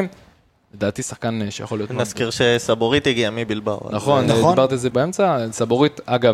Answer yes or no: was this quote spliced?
yes